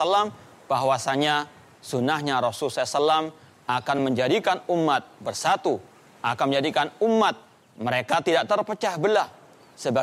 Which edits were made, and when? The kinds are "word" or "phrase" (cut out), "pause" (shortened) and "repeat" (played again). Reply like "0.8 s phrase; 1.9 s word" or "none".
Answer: none